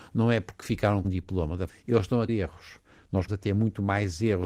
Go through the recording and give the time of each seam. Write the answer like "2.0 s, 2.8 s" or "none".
1.0 s, 1.7 s, 2.3 s, 3.3 s